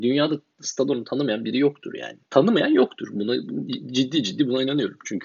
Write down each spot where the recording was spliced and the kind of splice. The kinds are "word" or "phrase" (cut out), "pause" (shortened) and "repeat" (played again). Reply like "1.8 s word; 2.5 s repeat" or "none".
2.3 s pause